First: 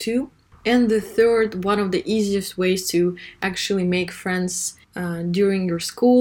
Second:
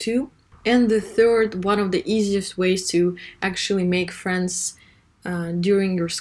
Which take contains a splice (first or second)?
first